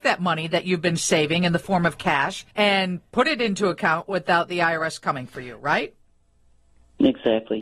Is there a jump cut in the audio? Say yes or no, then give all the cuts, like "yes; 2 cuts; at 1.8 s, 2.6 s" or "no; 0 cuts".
yes; 1 cut; at 2.5 s